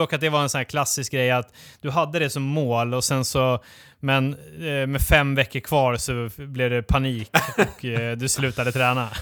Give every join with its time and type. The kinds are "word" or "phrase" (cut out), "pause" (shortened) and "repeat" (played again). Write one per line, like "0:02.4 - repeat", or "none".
none

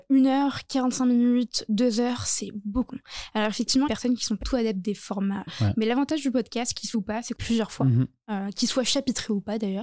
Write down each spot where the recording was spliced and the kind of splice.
0:02.9 - word
0:03.9 - phrase
0:04.4 - word
0:05.5 - word
0:06.9 - word
0:07.4 - phrase

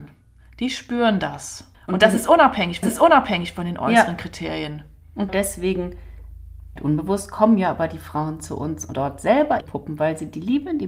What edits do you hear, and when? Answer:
0:01.7 - pause
0:02.8 - repeat
0:05.3 - word
0:06.8 - word
0:08.9 - word
0:09.6 - word

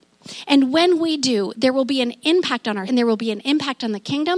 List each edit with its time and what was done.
0:02.9 - word

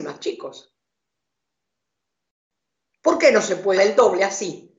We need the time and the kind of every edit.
0:03.8 - word

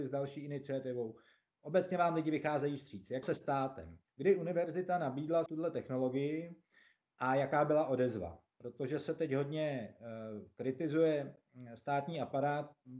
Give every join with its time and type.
0:03.2 - phrase
0:04.1 - pause
0:05.5 - word

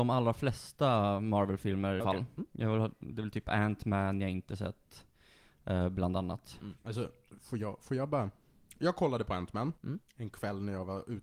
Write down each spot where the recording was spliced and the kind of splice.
0:02.0 - phrase
0:06.8 - pause
0:09.8 - pause

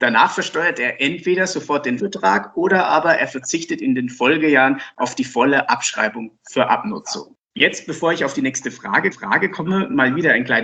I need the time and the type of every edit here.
0:02.0 - word
0:07.4 - pause
0:09.1 - repeat

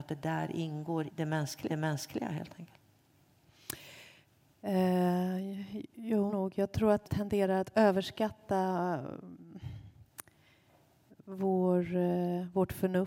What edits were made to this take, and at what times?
0:01.1 - word
0:01.7 - repeat
0:06.3 - phrase
0:07.0 - word

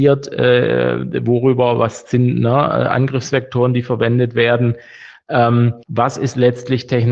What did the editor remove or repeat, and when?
0:05.8 - pause

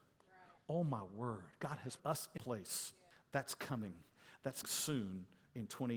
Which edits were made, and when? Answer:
0:02.0 - word
0:02.4 - phrase
0:03.1 - pause
0:04.6 - word

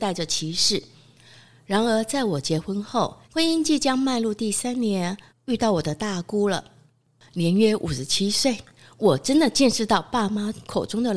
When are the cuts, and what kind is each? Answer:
0:03.2 - pause
0:05.3 - pause

